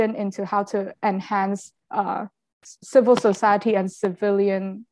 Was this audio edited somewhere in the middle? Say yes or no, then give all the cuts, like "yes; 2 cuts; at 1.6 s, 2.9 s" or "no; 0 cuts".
yes; 1 cut; at 1.8 s